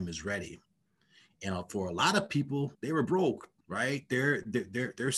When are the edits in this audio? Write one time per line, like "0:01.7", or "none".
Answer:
0:02.7
0:03.6